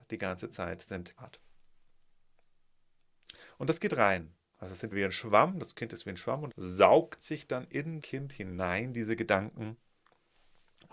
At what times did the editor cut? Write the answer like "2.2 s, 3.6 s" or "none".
1.2 s, 4.9 s, 6.5 s, 8.0 s